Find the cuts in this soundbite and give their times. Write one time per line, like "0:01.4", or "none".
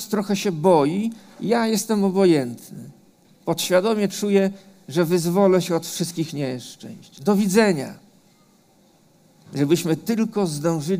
none

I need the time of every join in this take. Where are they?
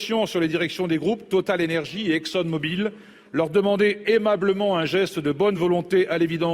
none

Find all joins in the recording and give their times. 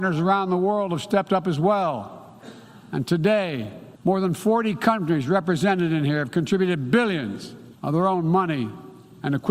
0:04.0
0:07.7

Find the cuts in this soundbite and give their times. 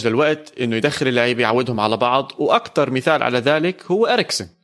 none

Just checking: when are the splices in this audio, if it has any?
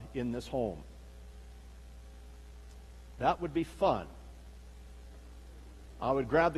none

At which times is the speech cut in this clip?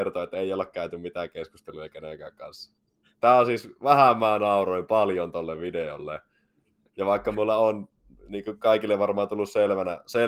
none

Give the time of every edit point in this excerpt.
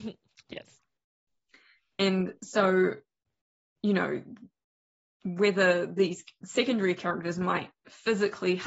none

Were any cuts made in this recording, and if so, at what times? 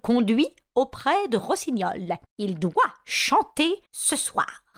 0:02.3
0:03.9

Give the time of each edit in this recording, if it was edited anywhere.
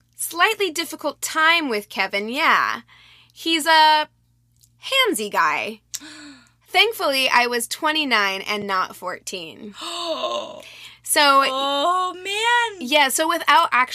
none

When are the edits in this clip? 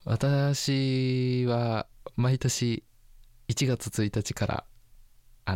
none

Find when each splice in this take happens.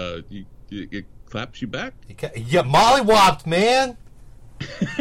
none

